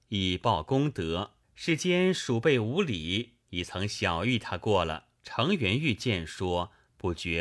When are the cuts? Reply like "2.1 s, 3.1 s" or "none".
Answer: 1.4 s, 3.4 s, 5.2 s